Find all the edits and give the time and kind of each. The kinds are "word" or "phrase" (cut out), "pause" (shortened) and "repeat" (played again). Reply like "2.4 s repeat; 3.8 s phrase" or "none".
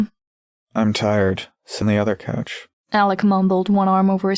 1.8 s word